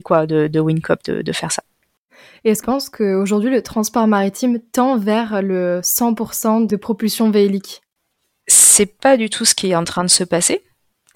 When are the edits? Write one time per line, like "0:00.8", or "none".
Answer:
0:02.6